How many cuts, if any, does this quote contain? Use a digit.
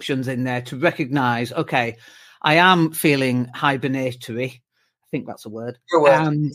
0